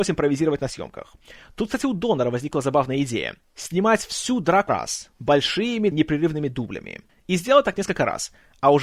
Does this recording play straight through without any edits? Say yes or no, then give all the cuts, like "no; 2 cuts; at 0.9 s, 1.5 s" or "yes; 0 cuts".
no; 2 cuts; at 4.7 s, 5.9 s